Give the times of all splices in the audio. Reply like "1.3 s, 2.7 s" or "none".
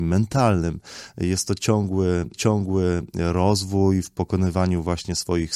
2.3 s